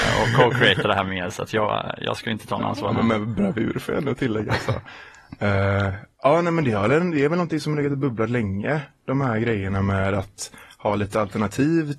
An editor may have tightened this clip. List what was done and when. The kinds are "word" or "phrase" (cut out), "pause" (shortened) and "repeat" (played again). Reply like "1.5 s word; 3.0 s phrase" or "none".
none